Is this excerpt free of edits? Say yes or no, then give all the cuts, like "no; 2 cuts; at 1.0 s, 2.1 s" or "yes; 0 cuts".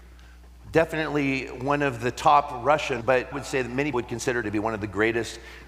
no; 4 cuts; at 3.0 s, 3.3 s, 3.9 s, 4.4 s